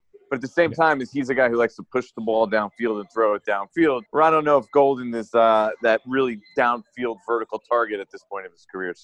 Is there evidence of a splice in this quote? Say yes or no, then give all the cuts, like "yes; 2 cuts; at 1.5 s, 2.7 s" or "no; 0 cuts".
yes; 1 cut; at 4.1 s